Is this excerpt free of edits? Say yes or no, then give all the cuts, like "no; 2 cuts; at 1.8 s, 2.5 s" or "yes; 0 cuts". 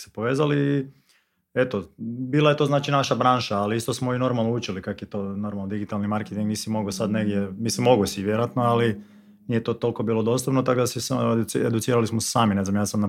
yes; 0 cuts